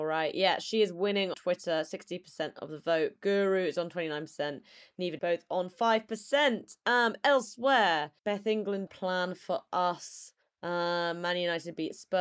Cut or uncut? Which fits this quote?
cut